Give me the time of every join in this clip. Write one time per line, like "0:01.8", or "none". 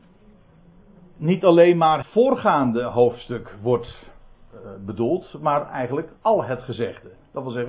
0:02.0
0:06.2